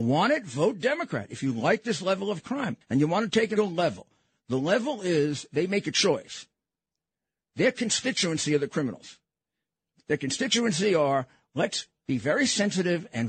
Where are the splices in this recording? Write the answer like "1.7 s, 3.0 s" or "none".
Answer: 2.8 s, 3.6 s